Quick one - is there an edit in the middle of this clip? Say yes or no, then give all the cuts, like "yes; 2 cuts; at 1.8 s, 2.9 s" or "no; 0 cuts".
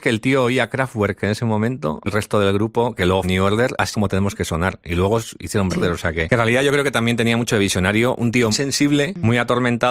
yes; 5 cuts; at 2.1 s, 3.2 s, 3.9 s, 5.7 s, 8.5 s